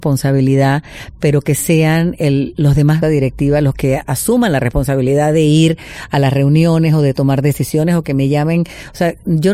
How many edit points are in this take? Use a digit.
1